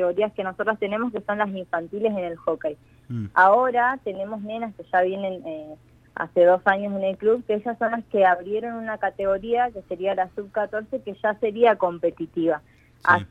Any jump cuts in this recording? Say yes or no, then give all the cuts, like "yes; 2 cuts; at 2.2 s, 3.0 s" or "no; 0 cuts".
no; 0 cuts